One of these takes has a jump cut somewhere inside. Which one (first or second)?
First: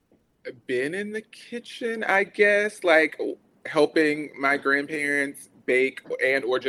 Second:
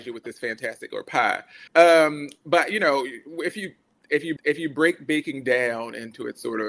second